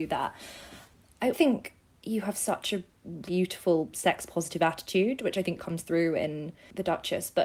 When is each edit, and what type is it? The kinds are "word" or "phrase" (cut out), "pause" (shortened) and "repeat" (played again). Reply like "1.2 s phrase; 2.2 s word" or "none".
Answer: 1.3 s word; 3.3 s word; 5.6 s word

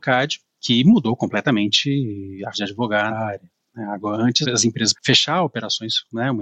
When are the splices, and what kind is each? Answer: 2.5 s word; 3.1 s word; 4.4 s word; 4.9 s word

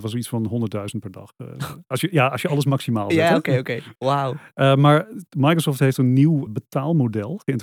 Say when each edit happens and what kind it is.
3.9 s pause; 6.5 s word

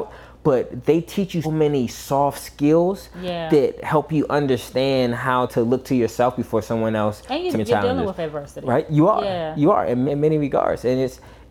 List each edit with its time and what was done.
1.4 s word; 5.5 s word; 7.5 s word; 10.1 s word

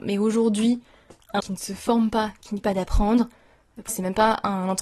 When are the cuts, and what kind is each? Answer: 1.4 s word; 2.6 s word; 3.9 s word

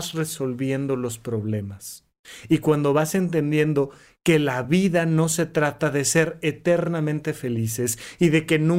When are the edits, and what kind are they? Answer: none

